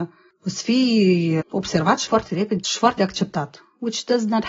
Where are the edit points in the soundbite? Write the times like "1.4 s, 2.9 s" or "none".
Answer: 1.4 s, 2.1 s, 2.6 s, 3.0 s